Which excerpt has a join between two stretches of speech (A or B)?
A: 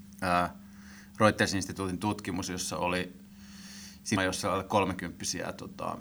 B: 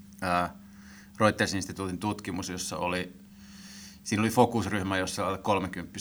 A